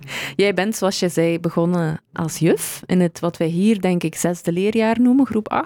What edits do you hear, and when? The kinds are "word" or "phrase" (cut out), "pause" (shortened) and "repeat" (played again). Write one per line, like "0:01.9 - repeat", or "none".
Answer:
none